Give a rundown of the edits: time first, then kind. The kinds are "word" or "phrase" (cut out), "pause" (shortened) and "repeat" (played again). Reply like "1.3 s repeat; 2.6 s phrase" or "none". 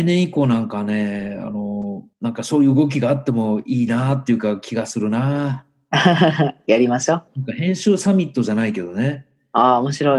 2.1 s pause; 7.3 s pause